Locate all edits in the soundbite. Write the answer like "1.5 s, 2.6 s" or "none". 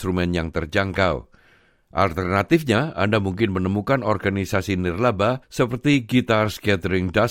5.4 s